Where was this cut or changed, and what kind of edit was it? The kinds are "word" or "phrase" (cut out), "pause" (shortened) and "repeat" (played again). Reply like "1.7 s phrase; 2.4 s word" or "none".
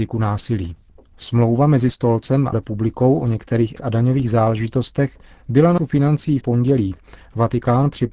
1.9 s word; 2.5 s word; 3.8 s word; 5.3 s pause; 5.8 s word; 6.4 s phrase